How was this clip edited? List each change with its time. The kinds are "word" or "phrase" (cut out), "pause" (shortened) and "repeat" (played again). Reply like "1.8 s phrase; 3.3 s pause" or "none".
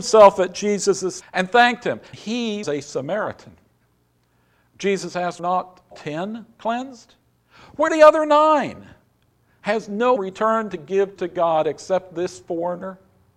1.2 s word; 2.1 s word; 2.6 s word; 5.4 s word; 5.9 s word; 7.9 s word; 10.2 s word; 11.2 s word